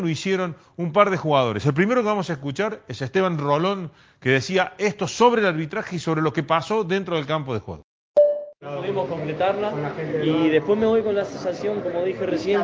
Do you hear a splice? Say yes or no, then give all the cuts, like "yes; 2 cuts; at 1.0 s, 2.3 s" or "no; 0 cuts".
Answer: no; 0 cuts